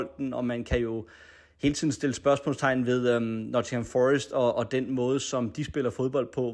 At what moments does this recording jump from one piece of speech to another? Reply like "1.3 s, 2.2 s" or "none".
none

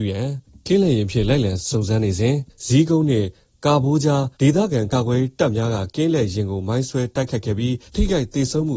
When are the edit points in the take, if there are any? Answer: 4.3 s, 7.9 s

